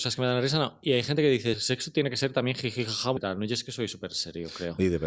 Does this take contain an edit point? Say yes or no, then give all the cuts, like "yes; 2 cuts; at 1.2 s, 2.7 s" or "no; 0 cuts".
yes; 2 cuts; at 1.5 s, 3.2 s